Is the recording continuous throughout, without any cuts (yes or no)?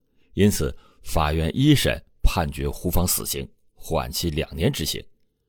yes